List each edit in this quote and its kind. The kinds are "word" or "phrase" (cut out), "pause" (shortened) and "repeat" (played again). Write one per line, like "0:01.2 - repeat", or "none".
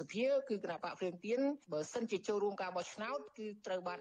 0:01.6 - pause